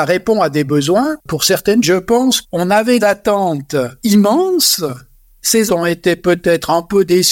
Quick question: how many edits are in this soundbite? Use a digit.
4